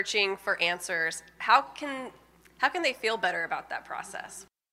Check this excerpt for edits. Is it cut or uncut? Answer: uncut